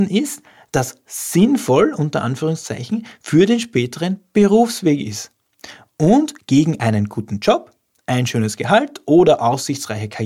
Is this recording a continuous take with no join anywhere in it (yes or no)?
yes